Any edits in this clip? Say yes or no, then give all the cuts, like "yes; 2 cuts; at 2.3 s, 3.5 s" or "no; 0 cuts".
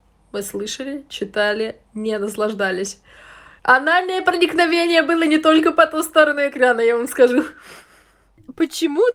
no; 0 cuts